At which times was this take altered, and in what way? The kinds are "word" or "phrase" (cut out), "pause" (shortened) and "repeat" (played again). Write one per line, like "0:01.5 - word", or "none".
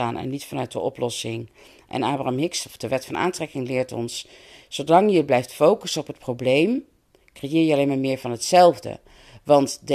none